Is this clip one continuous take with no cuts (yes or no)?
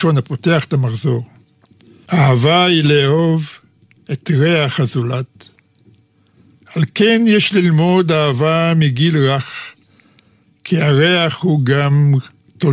yes